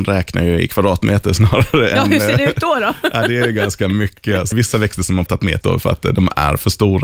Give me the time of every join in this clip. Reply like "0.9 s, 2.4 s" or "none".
4.5 s, 5.3 s, 5.6 s